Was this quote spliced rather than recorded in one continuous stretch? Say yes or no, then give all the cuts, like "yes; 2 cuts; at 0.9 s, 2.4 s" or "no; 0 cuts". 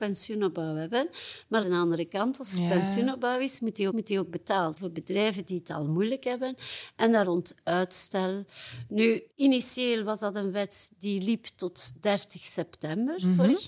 yes; 5 cuts; at 1.6 s, 3.9 s, 4.8 s, 7.2 s, 9.3 s